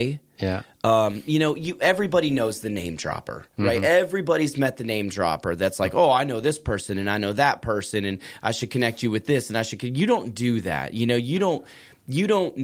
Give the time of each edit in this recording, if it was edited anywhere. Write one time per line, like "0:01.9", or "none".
0:03.5